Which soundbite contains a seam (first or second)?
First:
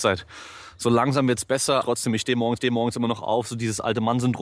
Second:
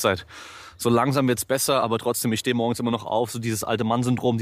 first